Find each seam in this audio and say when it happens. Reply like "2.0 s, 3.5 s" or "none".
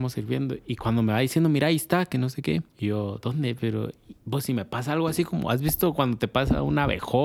2.7 s